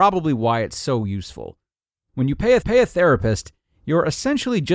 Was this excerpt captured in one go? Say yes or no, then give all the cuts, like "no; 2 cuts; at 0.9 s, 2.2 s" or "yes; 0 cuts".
no; 1 cut; at 2.6 s